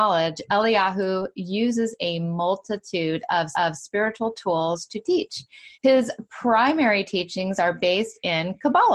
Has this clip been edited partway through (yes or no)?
yes